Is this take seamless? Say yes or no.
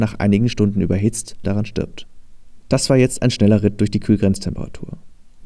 no